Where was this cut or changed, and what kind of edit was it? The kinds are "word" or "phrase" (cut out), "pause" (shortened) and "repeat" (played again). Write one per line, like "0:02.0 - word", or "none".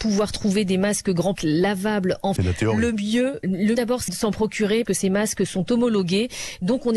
0:01.4 - word
0:02.4 - word
0:03.4 - word
0:03.8 - word
0:04.1 - word
0:04.8 - word